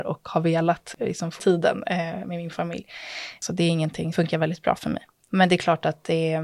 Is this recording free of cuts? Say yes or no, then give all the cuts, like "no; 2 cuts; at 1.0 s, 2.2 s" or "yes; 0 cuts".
no; 3 cuts; at 1.4 s, 2.2 s, 4.1 s